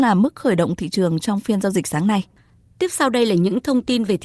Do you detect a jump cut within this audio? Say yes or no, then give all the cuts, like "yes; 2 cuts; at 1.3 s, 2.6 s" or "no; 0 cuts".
no; 0 cuts